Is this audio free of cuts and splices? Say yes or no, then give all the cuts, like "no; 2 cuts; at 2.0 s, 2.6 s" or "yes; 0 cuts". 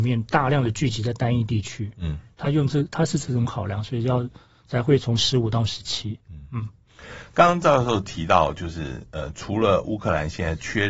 yes; 0 cuts